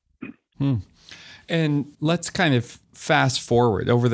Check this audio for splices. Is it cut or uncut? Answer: cut